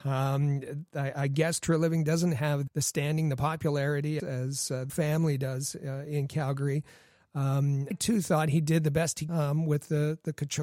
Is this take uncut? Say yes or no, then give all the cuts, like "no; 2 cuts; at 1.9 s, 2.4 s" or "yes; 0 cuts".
no; 5 cuts; at 2.7 s, 4.2 s, 4.9 s, 7.9 s, 9.3 s